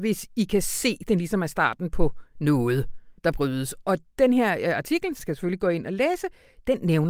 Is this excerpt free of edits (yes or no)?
no